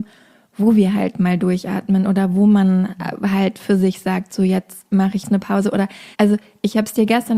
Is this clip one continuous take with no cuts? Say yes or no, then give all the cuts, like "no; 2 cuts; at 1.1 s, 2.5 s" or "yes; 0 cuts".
no; 2 cuts; at 5.2 s, 6.1 s